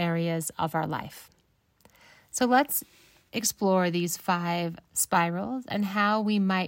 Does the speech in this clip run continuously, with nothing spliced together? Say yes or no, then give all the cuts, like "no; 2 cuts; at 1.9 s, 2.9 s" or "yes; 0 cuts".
yes; 0 cuts